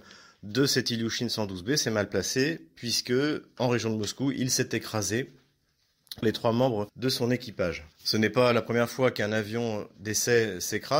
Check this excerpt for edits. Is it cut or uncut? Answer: cut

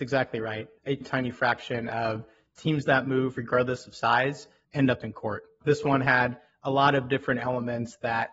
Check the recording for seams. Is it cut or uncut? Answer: uncut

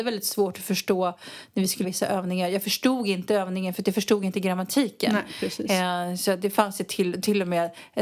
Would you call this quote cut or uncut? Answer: cut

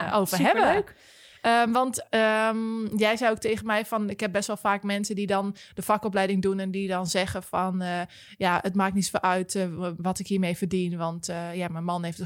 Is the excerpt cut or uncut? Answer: uncut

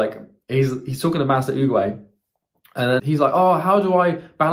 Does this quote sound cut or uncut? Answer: cut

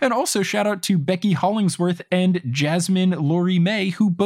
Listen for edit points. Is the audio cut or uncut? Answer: uncut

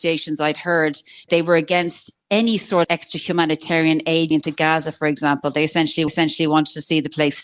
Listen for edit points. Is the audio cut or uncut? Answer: cut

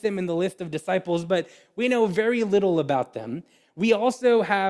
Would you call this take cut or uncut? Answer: uncut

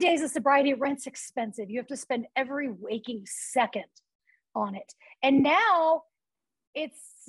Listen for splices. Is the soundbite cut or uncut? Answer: uncut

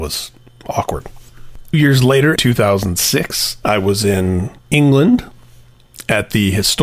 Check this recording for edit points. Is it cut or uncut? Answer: cut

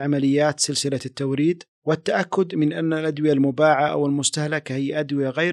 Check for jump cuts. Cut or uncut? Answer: uncut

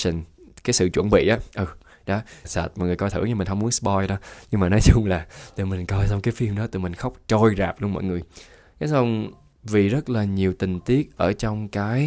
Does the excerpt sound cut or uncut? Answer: cut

